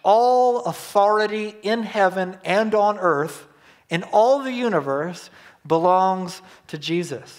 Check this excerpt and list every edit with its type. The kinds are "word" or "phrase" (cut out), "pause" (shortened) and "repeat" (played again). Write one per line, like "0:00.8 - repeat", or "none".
none